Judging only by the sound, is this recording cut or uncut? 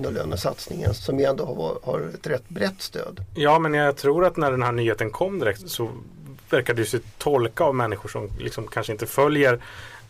cut